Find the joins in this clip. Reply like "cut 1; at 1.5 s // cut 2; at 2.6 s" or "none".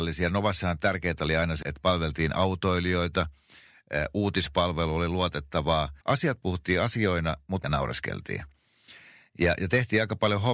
cut 1; at 1.6 s // cut 2; at 6.0 s // cut 3; at 7.6 s